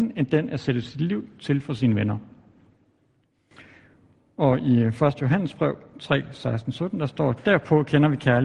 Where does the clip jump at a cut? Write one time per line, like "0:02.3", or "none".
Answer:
none